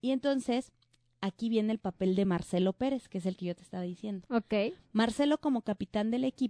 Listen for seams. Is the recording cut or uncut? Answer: uncut